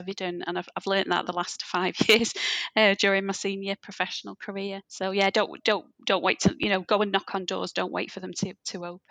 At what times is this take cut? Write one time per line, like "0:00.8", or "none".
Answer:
0:04.8
0:05.9